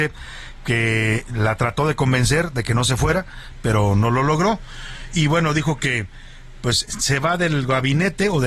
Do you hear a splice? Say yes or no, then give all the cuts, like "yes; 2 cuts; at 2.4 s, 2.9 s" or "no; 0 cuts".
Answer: no; 0 cuts